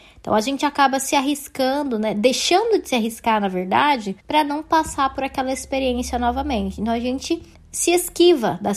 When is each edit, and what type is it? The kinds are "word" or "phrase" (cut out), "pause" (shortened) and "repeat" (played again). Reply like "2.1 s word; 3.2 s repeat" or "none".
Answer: 4.2 s pause; 7.5 s pause